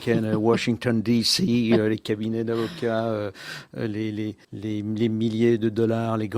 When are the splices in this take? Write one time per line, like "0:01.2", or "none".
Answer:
0:04.4